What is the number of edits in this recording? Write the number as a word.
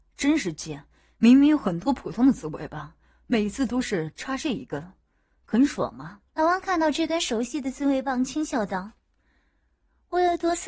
one